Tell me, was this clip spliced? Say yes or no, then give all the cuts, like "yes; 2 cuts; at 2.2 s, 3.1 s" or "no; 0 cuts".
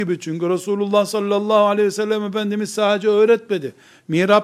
no; 0 cuts